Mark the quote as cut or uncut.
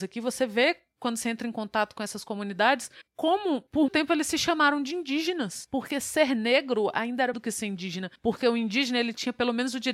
cut